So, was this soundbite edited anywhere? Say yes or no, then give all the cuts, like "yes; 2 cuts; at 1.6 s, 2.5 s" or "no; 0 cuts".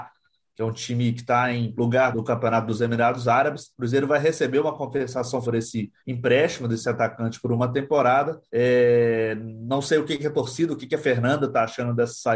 yes; 6 cuts; at 1.7 s, 2.1 s, 3.7 s, 5.4 s, 6.0 s, 8.5 s